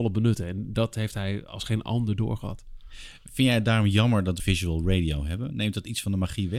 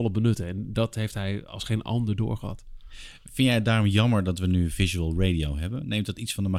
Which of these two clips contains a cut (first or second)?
first